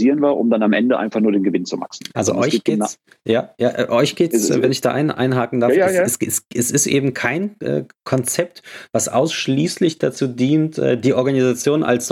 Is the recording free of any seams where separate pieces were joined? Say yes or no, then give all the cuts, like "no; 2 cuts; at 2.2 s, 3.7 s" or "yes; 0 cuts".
yes; 0 cuts